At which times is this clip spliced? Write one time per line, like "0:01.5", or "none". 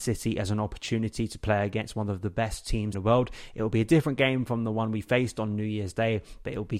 0:02.9